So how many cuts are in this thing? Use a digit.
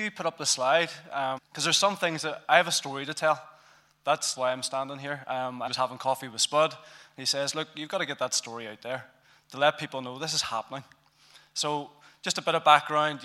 3